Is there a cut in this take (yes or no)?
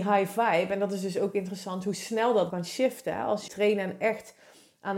yes